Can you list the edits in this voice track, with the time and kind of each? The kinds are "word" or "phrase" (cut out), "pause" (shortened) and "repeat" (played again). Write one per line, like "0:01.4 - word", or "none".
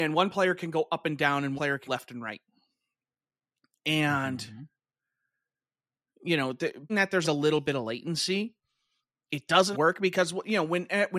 0:01.6 - word
0:01.9 - word
0:06.9 - word
0:07.2 - word
0:09.7 - word